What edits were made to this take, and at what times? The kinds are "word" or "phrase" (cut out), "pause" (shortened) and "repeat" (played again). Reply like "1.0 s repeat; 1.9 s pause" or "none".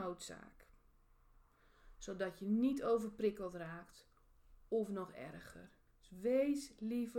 5.9 s pause